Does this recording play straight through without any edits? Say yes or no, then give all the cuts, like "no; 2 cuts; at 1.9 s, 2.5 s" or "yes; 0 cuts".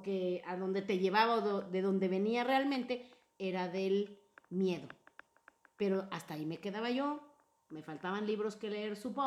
yes; 0 cuts